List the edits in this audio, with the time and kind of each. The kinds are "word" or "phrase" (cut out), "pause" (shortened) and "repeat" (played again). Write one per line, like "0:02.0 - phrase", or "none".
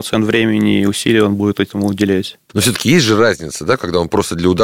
none